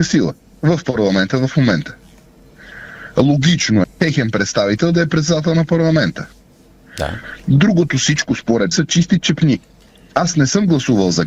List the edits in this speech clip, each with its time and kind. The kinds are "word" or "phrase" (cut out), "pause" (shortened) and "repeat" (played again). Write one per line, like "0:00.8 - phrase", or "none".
0:03.8 - word
0:08.7 - word